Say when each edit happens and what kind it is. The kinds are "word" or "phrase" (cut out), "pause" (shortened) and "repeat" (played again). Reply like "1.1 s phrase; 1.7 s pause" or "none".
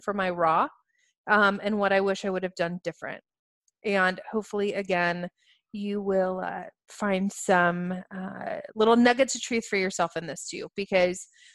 none